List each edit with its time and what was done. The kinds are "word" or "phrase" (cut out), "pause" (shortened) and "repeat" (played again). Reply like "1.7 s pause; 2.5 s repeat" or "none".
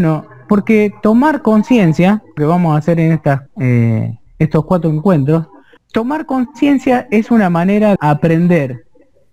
2.4 s phrase; 3.5 s word; 4.3 s pause; 5.8 s pause; 8.0 s word